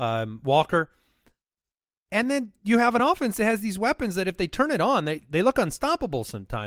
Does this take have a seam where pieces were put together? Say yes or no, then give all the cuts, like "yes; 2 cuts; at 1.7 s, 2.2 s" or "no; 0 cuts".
no; 0 cuts